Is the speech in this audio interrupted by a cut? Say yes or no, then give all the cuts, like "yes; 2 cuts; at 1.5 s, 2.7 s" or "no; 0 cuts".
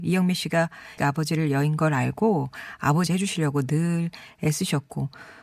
yes; 2 cuts; at 1.0 s, 3.1 s